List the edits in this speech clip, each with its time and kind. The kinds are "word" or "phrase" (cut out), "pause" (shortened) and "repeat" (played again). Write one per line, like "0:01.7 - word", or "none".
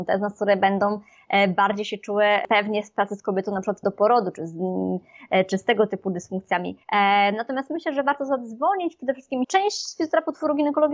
0:03.8 - word
0:06.8 - pause
0:09.4 - phrase

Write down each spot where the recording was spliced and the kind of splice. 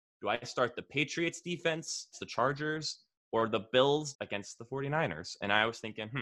0:02.1 - word
0:04.1 - word

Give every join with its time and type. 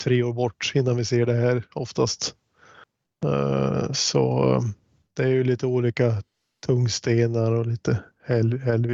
none

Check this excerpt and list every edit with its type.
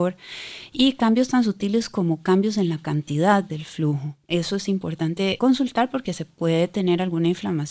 none

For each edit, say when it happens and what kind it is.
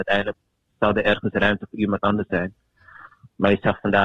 none

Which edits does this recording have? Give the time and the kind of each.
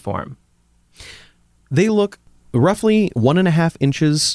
none

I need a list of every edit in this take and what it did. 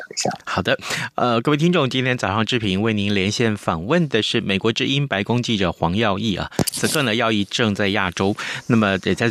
none

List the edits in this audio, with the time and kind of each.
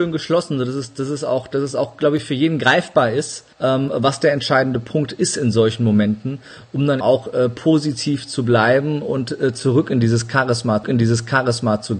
0:03.5 - pause
0:07.0 - word
0:10.8 - repeat

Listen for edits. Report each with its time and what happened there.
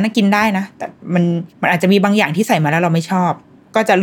0:01.5 - pause

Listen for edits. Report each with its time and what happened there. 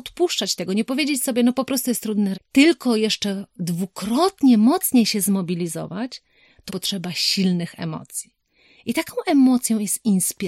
0:02.3 - word
0:06.7 - word

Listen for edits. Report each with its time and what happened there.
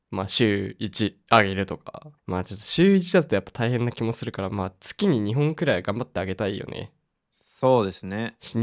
0:02.2 - pause
0:07.3 - pause

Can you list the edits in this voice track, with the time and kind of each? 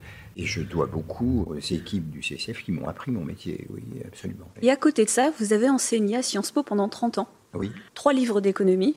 0:07.9 - pause

